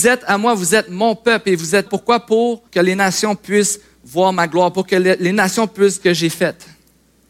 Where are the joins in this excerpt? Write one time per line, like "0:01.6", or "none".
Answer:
0:01.9
0:02.7
0:06.0